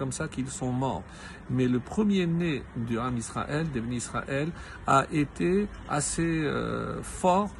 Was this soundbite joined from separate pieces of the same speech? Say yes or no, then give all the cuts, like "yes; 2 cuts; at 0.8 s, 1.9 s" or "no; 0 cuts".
no; 0 cuts